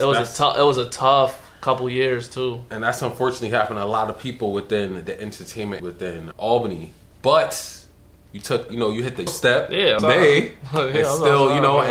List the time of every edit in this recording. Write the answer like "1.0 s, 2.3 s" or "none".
5.8 s, 6.3 s, 8.7 s, 9.3 s, 10.0 s